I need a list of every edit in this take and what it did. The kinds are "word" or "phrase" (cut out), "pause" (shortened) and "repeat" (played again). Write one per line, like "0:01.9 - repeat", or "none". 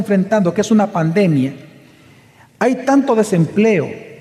none